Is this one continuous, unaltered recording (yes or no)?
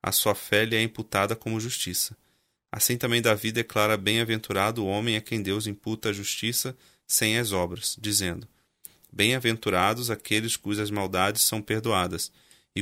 yes